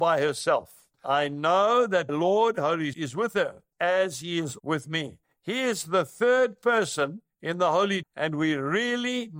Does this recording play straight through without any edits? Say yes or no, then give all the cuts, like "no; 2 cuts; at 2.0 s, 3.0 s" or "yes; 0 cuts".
no; 7 cuts; at 0.9 s, 2.1 s, 2.9 s, 3.7 s, 4.6 s, 5.2 s, 8.0 s